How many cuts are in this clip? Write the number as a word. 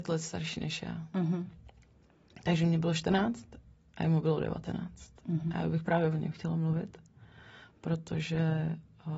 zero